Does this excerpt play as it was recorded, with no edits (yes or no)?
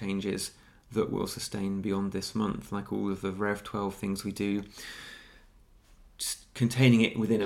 yes